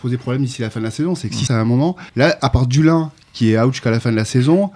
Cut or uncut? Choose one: cut